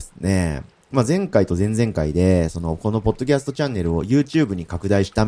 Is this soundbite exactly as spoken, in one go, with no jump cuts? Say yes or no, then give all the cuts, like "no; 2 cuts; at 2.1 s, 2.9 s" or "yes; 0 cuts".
yes; 0 cuts